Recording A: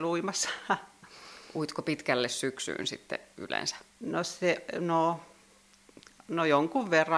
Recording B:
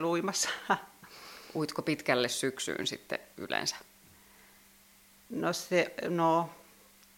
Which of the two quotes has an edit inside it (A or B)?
A